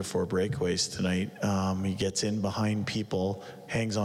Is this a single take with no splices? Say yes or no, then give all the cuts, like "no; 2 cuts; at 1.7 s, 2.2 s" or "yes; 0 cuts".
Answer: yes; 0 cuts